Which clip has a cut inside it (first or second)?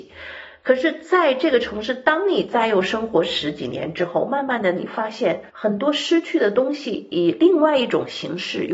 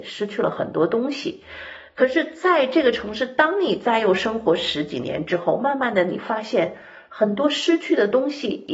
first